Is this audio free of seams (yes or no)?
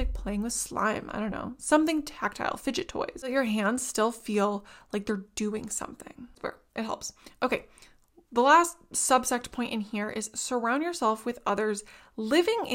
yes